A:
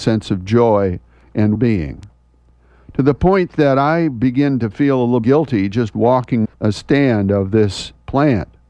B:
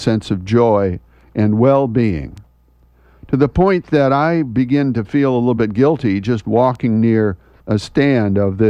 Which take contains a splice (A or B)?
A